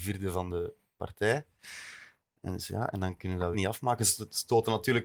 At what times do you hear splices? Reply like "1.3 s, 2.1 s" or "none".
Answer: 3.5 s